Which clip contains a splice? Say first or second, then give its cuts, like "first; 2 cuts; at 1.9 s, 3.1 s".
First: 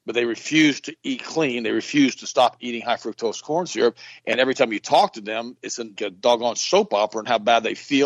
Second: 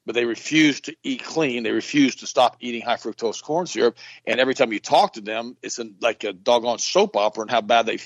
first; 1 cut; at 6.0 s